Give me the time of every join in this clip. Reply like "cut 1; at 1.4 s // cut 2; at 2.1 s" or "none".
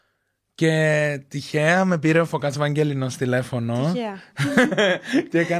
none

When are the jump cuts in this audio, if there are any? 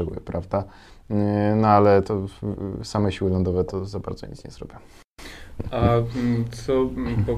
none

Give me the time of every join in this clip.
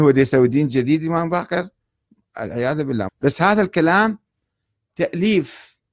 cut 1; at 3.1 s

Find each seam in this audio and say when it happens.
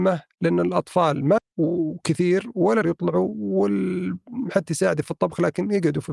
cut 1; at 1.4 s // cut 2; at 2.8 s // cut 3; at 4.7 s

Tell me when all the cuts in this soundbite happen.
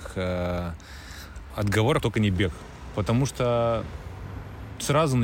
cut 1; at 1.5 s // cut 2; at 2.0 s

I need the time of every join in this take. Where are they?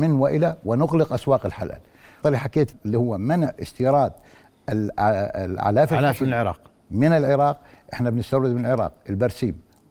cut 1; at 2.2 s // cut 2; at 2.7 s

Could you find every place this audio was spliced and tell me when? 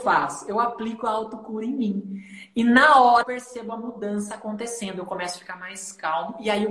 cut 1; at 3.2 s

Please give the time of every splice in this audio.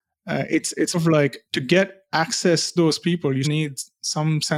cut 1; at 0.9 s // cut 2; at 1.5 s // cut 3; at 2.8 s // cut 4; at 3.4 s

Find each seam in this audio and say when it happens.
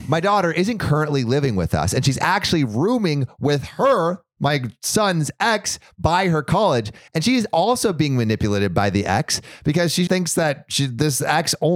cut 1; at 10.1 s

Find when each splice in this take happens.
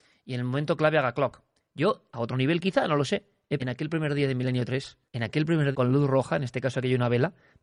cut 1; at 2.1 s // cut 2; at 3.6 s // cut 3; at 5.1 s // cut 4; at 5.7 s

